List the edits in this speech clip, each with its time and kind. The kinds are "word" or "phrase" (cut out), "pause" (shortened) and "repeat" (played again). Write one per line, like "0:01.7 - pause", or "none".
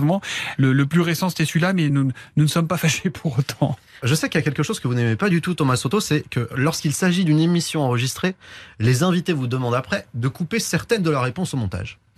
none